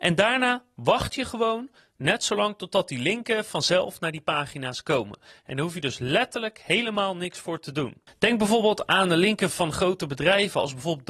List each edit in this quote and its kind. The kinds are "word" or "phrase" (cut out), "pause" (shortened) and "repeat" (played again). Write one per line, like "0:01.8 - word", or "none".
0:09.5 - word

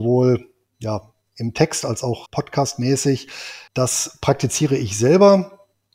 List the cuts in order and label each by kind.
0:02.3 - word
0:03.7 - pause

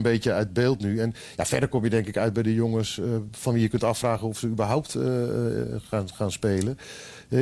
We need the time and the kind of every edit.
none

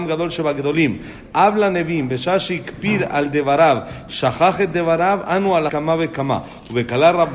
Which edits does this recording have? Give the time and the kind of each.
0:05.7 - word

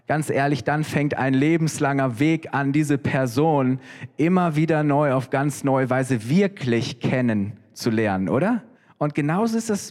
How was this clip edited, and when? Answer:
0:08.7 - pause

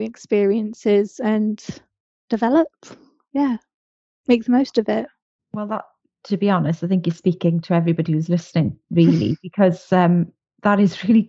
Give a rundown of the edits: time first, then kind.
none

